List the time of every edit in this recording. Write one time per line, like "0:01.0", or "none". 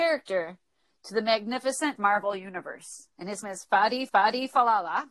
0:02.0
0:03.1
0:03.4
0:04.1